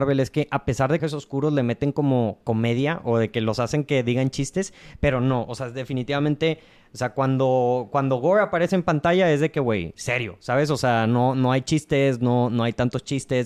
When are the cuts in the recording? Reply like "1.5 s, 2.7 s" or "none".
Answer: 1.0 s